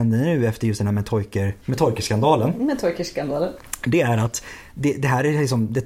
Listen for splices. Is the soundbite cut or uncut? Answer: cut